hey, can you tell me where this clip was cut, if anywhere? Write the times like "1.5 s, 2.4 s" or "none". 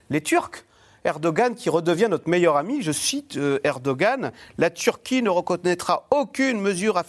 none